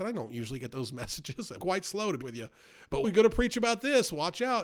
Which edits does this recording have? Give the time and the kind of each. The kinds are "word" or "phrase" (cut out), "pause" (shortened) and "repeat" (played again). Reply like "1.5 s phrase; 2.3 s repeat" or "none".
1.6 s phrase; 2.2 s word; 3.0 s word